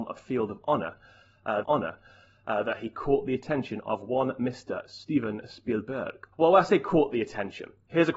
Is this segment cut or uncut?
cut